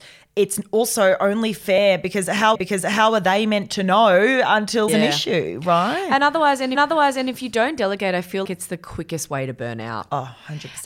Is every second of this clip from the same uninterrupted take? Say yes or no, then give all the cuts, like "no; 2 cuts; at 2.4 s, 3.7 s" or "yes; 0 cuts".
no; 4 cuts; at 2.5 s, 4.9 s, 6.7 s, 8.4 s